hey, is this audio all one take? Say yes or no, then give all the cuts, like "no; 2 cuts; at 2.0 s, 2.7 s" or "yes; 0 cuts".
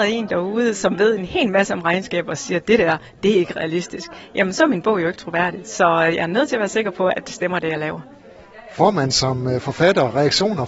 yes; 0 cuts